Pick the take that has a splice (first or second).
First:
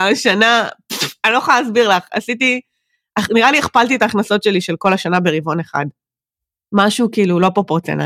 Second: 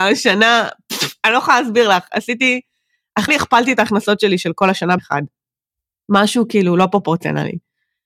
second